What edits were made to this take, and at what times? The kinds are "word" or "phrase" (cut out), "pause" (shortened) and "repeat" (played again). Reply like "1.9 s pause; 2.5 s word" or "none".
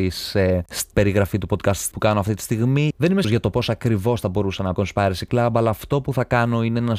0.9 s word; 1.9 s word; 3.2 s word; 4.8 s phrase